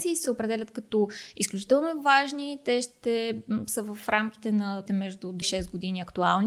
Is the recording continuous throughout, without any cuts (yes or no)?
no